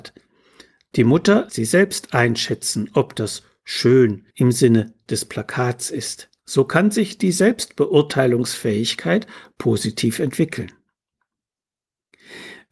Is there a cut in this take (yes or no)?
yes